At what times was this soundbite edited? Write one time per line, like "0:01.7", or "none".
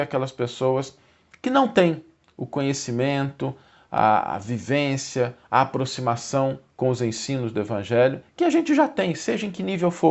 none